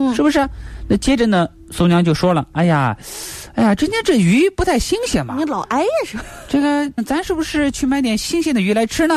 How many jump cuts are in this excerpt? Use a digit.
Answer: 1